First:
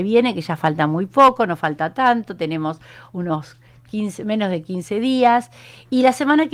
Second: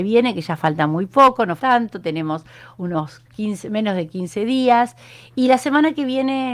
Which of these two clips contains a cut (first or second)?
second